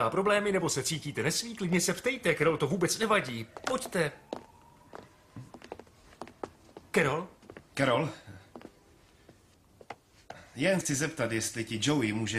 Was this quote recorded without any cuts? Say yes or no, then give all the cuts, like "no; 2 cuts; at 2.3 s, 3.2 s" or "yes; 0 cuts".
no; 1 cut; at 10.8 s